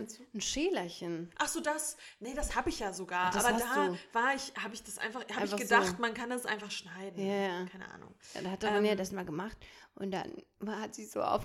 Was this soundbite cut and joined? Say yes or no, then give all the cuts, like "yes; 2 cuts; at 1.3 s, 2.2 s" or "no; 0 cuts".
no; 0 cuts